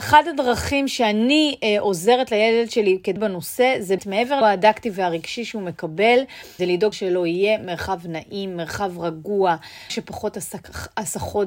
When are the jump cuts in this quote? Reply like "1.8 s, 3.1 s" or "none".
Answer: 3.2 s, 4.0 s, 4.4 s, 6.6 s, 6.9 s, 9.9 s